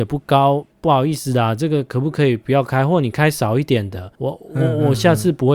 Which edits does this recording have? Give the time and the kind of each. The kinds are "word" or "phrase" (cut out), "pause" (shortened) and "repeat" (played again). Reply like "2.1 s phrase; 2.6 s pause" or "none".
4.1 s pause